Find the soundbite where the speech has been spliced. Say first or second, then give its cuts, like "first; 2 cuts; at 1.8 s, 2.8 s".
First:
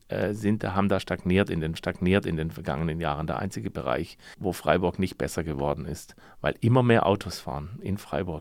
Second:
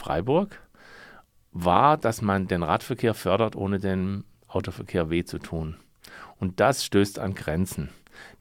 first; 2 cuts; at 1.8 s, 4.3 s